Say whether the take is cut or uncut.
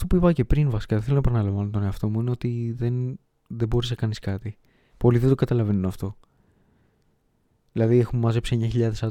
uncut